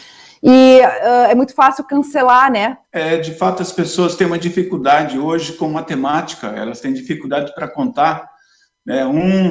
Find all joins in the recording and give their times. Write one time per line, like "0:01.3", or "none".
0:02.8